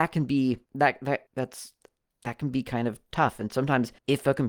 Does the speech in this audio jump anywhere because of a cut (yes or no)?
no